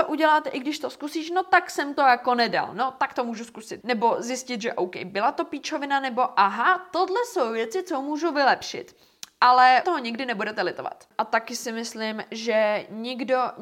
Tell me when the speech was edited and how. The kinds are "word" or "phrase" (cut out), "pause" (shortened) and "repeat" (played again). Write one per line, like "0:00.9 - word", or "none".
0:03.8 - word
0:09.8 - word